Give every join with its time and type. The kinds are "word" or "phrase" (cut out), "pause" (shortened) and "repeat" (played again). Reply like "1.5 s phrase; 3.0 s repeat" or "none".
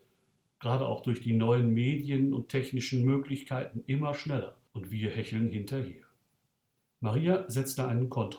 4.7 s pause; 6.8 s pause